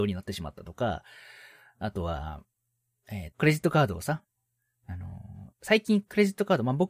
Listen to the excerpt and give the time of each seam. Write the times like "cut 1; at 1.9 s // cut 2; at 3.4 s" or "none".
cut 1; at 3.3 s